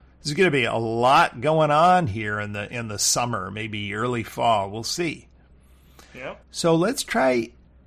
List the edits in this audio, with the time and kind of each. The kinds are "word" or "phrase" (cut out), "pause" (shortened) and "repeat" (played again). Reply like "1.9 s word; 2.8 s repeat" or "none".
6.4 s pause